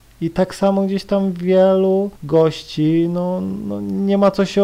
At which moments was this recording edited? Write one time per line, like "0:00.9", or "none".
0:02.2

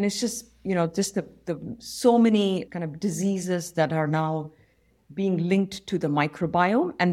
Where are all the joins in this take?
0:02.7

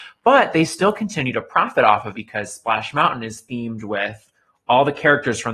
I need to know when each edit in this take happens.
0:02.1

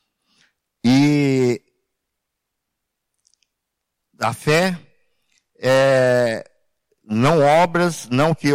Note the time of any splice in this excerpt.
none

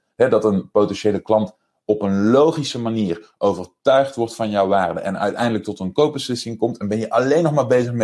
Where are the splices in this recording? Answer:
none

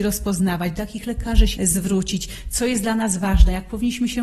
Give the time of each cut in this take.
0:01.6

